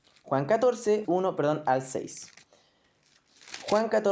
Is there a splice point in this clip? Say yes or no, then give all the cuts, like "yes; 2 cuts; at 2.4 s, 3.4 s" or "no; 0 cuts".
yes; 1 cut; at 1.0 s